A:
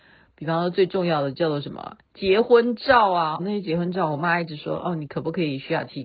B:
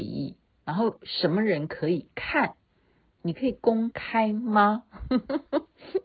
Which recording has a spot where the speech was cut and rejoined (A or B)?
A